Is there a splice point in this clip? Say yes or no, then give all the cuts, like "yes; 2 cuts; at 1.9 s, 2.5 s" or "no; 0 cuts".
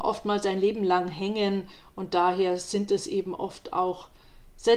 no; 0 cuts